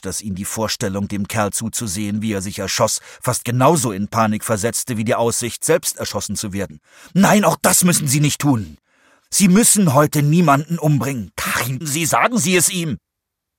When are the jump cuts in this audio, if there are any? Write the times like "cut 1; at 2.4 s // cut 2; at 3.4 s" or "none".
cut 1; at 1.5 s // cut 2; at 11.8 s